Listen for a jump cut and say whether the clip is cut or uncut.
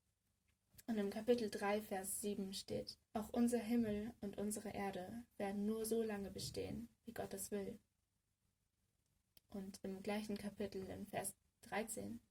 cut